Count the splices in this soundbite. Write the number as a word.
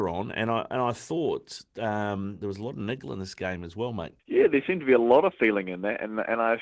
two